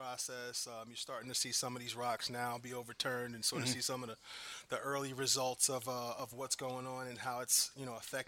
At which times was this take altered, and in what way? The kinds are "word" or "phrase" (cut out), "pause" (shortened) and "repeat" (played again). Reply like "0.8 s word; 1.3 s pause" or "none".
none